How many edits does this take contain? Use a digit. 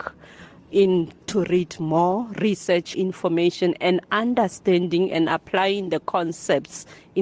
2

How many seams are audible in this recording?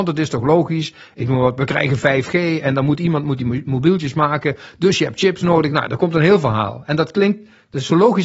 0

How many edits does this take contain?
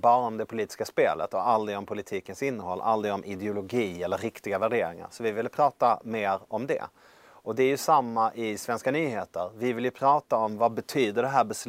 0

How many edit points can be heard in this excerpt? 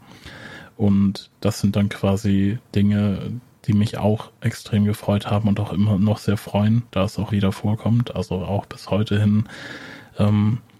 2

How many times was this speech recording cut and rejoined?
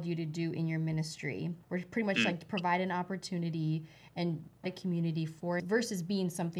3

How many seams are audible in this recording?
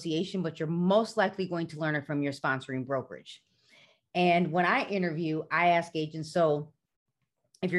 0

